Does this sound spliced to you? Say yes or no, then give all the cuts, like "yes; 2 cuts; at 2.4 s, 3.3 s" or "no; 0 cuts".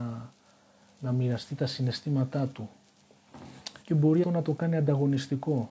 yes; 2 cuts; at 3.8 s, 4.2 s